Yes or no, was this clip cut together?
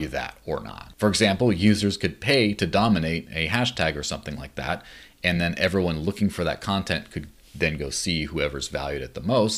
no